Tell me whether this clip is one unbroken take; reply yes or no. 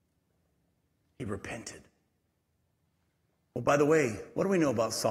yes